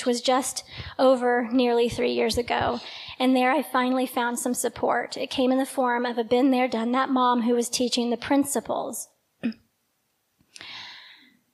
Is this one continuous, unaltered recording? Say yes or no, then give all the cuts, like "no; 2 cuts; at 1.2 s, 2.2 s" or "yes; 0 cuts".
yes; 0 cuts